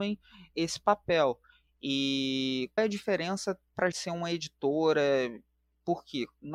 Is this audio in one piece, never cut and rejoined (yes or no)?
no